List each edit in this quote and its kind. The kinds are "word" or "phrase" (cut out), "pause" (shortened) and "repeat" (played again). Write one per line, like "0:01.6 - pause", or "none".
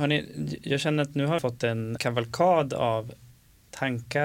0:01.4 - phrase
0:02.0 - word